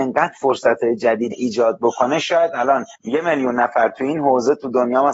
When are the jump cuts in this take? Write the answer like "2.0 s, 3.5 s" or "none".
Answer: 1.3 s, 3.0 s